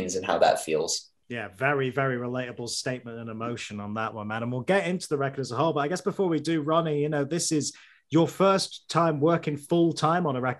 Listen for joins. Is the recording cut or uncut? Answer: uncut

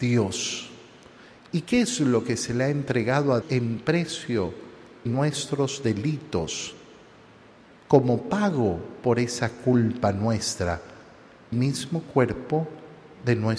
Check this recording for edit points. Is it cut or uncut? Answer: cut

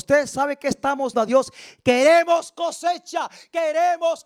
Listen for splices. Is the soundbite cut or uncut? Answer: cut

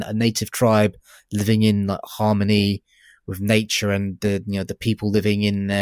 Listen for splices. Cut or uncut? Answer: uncut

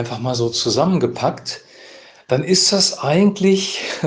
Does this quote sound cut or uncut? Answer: uncut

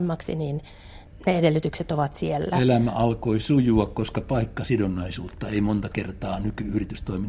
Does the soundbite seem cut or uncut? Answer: uncut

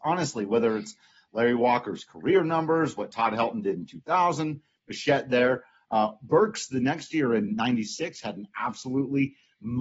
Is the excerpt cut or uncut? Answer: uncut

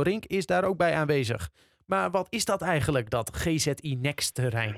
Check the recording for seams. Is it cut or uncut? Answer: uncut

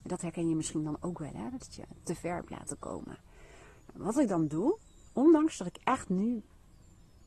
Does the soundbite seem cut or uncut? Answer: uncut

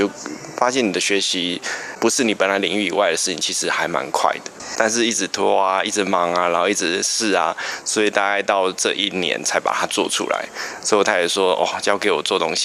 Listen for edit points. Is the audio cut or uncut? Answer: uncut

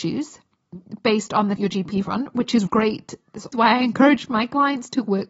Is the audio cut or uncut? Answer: cut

